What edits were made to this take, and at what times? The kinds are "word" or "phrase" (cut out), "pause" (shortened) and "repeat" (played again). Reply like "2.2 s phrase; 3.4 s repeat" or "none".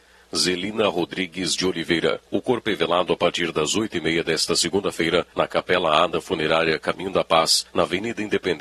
2.3 s pause; 5.3 s pause; 7.7 s pause

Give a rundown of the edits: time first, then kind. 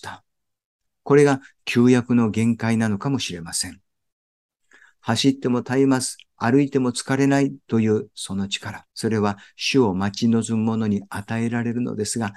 8.9 s pause

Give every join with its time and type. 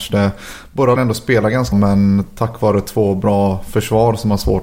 1.0 s word; 1.7 s word

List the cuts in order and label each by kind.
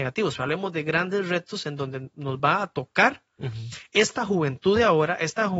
none

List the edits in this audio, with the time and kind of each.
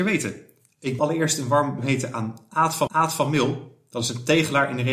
1.0 s word; 1.8 s word; 2.9 s repeat

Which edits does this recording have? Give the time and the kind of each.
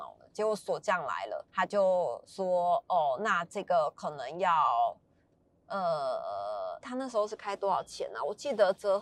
1.5 s pause; 6.8 s word

